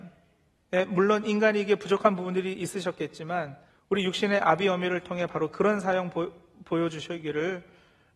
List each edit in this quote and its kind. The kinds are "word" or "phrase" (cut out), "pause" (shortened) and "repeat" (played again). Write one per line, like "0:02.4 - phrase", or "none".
0:03.7 - pause